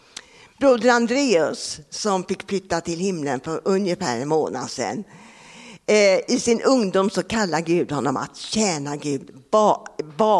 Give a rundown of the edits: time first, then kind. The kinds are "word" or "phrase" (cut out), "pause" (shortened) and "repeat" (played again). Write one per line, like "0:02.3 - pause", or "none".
none